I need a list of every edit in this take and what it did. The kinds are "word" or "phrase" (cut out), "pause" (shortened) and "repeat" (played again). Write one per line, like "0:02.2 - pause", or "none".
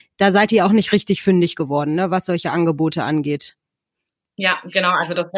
none